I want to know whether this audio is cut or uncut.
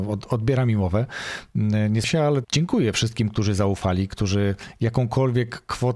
cut